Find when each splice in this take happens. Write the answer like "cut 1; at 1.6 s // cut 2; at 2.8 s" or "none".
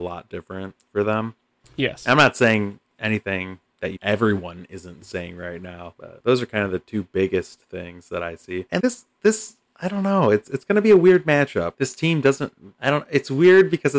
cut 1; at 4.0 s // cut 2; at 8.8 s // cut 3; at 12.8 s